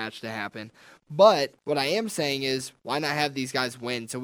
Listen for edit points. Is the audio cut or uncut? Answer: cut